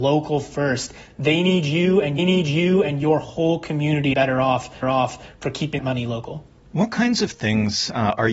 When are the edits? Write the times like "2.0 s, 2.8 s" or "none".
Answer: 2.2 s, 4.1 s, 4.8 s, 5.8 s, 6.6 s